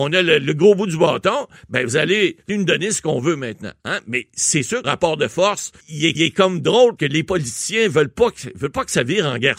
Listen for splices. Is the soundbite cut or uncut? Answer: cut